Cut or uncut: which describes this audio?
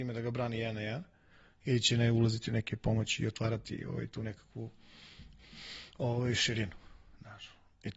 uncut